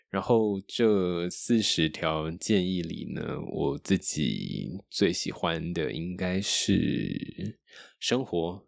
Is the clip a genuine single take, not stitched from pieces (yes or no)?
yes